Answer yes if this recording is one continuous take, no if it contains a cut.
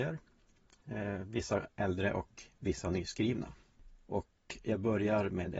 yes